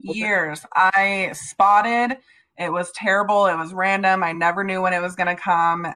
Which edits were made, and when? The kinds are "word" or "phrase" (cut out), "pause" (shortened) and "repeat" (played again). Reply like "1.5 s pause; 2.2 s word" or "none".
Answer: none